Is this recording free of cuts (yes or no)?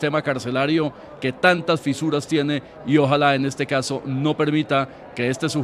yes